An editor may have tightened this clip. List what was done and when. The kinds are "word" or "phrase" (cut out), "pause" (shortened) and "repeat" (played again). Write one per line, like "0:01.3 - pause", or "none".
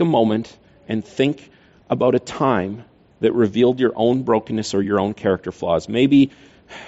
none